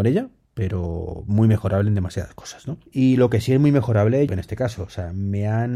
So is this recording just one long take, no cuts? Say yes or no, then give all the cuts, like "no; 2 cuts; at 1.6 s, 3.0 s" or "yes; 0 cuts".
no; 2 cuts; at 2.9 s, 4.3 s